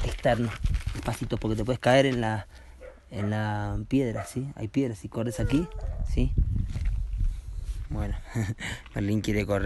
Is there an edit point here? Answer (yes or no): no